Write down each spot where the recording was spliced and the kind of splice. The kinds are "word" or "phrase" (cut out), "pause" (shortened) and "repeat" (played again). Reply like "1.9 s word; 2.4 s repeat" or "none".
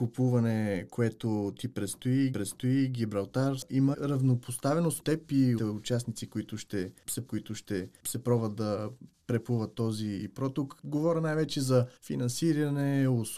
2.3 s repeat; 3.9 s word; 5.0 s word; 5.6 s word; 7.3 s repeat; 12.0 s pause